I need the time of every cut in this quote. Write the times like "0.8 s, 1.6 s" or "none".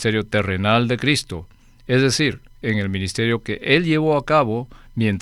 none

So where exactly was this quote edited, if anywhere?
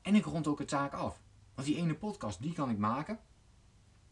none

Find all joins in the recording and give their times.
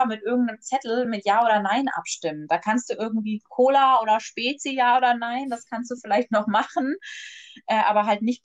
none

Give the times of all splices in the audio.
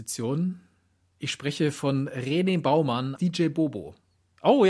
3.2 s

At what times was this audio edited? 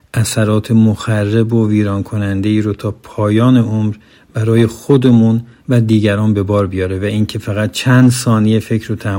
none

